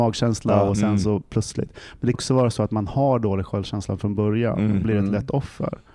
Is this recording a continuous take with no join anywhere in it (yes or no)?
no